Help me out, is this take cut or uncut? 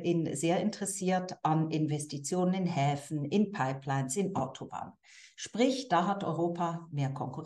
uncut